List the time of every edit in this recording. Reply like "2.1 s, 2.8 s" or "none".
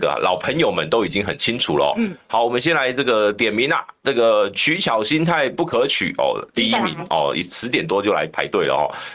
none